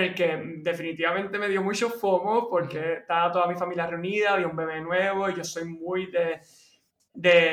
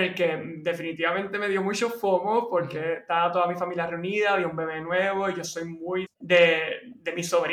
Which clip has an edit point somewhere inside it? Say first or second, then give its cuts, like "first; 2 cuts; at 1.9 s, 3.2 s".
second; 1 cut; at 6.1 s